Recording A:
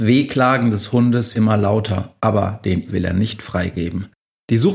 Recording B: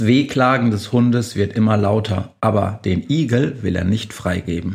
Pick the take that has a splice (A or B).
A